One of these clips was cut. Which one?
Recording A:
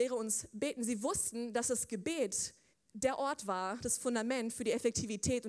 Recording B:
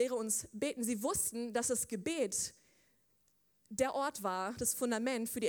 A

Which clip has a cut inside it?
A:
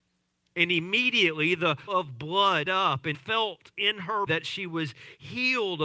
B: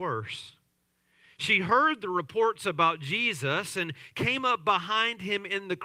A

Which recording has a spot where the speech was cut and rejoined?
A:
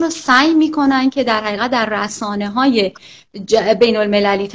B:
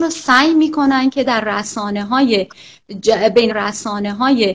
B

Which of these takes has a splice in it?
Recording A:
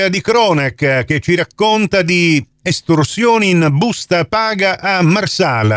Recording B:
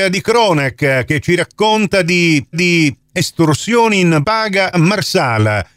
B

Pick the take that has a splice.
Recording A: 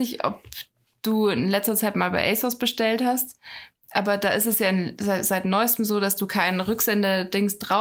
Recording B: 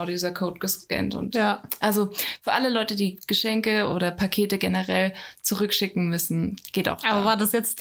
B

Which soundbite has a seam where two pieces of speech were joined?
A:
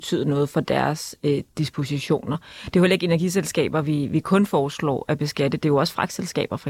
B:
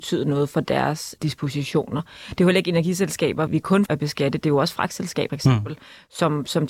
B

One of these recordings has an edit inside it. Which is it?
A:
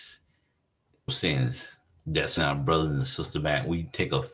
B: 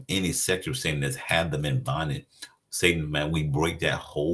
A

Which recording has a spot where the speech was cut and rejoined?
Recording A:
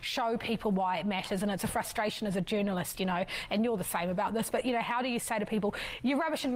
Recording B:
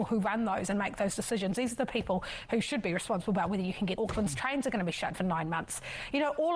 B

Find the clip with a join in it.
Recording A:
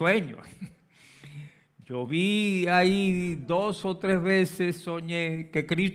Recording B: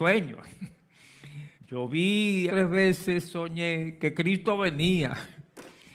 B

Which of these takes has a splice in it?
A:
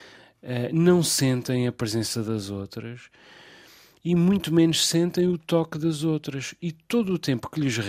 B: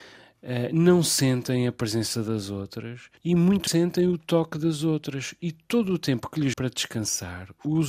B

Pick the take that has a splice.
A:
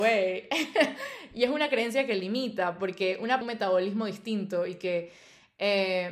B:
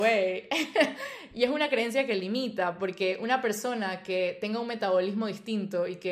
A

